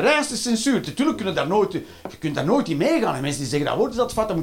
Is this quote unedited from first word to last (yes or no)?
yes